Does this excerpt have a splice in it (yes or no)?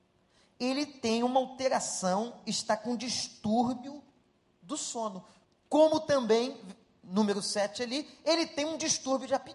yes